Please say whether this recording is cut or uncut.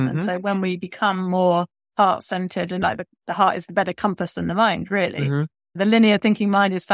cut